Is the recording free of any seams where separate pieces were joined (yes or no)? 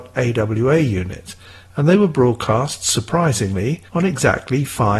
no